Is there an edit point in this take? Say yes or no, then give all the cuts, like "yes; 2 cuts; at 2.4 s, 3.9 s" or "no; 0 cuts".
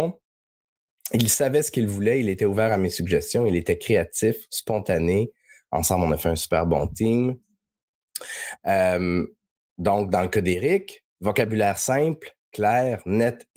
no; 0 cuts